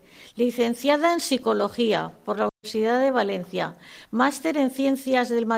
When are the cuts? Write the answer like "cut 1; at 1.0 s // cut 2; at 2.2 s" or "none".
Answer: cut 1; at 2.5 s

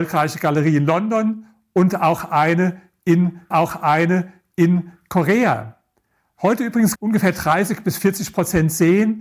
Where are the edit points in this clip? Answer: cut 1; at 3.5 s // cut 2; at 7.0 s

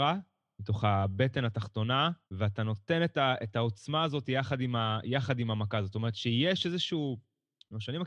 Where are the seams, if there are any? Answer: cut 1; at 2.2 s

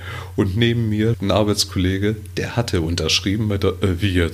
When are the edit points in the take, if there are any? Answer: cut 1; at 1.1 s

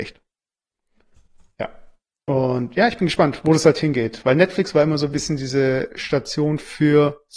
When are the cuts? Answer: none

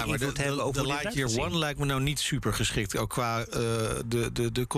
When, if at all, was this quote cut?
none

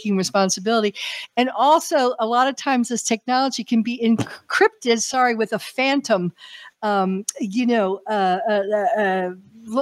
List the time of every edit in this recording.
none

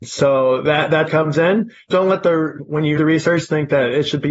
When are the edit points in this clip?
cut 1; at 1.1 s // cut 2; at 2.6 s // cut 3; at 3.0 s

